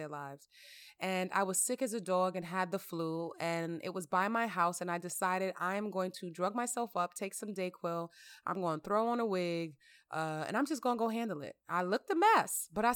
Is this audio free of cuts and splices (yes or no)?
yes